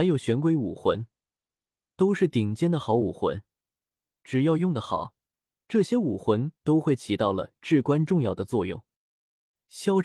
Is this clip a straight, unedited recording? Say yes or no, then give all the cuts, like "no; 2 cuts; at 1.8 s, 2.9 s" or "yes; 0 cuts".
yes; 0 cuts